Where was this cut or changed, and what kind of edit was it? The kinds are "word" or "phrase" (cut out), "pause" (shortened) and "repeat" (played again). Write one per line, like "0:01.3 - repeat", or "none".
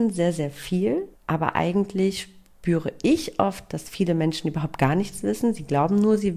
0:01.1 - pause

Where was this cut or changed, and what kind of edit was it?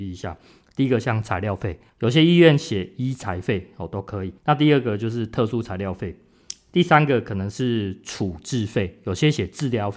0:01.9 - pause
0:04.4 - pause

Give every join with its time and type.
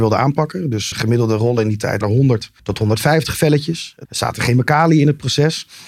0:00.9 - word
0:02.0 - word
0:02.6 - pause
0:04.0 - phrase

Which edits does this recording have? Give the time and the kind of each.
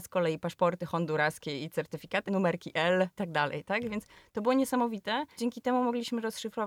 0:02.3 - word
0:03.1 - word
0:05.4 - word

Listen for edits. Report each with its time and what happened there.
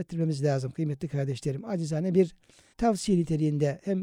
0:02.7 - word

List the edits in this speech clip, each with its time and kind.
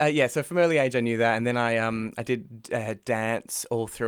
none

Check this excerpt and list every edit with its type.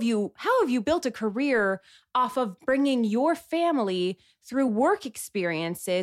none

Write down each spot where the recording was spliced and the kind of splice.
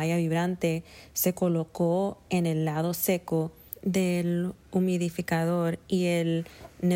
none

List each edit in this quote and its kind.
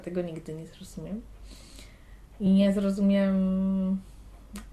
none

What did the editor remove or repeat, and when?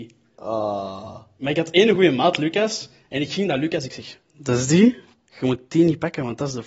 none

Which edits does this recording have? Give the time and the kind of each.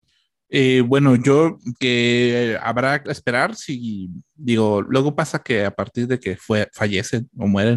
0:01.7 - word
0:03.0 - word

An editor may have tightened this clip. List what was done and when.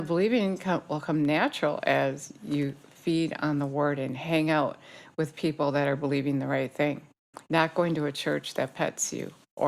none

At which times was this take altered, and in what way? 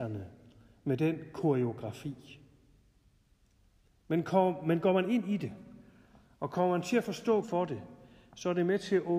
0:07.4 - word

